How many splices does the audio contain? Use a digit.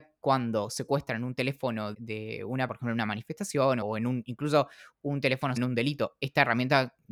4